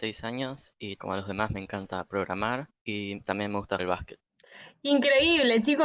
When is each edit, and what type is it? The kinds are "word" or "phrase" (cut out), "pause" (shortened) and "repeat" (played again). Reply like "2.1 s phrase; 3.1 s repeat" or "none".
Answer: 1.0 s word; 2.7 s pause; 3.8 s word